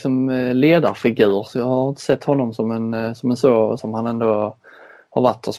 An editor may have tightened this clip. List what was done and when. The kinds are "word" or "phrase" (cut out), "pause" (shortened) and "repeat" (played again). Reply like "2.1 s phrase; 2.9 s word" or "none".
3.8 s phrase

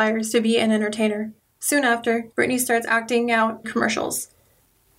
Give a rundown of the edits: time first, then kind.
1.4 s pause; 2.3 s pause; 3.6 s word

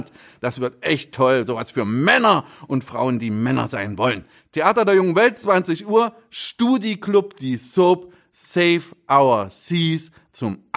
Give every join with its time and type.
none

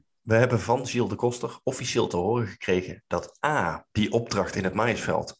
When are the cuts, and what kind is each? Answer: 3.9 s pause

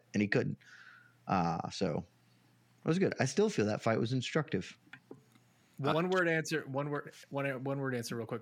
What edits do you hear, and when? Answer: 5.9 s word

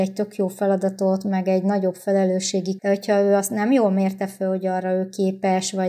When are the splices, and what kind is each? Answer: 2.8 s word

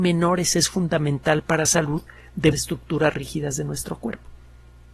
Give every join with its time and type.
1.6 s word; 2.5 s word

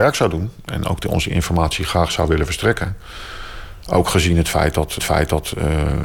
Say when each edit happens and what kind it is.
5.0 s repeat

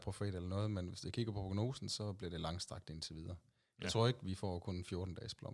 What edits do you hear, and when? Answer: none

